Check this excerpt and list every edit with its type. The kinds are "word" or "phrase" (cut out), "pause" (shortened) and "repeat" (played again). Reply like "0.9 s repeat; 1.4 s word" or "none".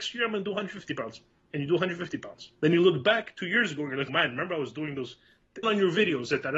2.6 s pause; 4.1 s word; 5.6 s word